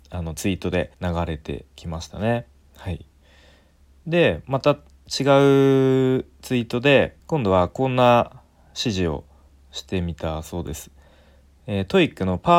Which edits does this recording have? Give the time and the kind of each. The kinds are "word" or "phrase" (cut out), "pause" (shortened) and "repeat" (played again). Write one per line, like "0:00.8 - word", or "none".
0:00.9 - pause
0:07.2 - pause